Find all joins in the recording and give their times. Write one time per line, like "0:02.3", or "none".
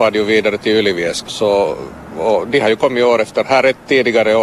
0:01.3
0:03.4